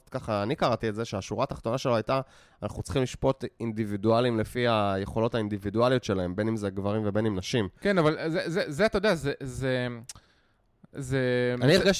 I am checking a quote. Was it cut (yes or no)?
no